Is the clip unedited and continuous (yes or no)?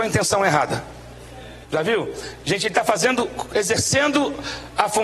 no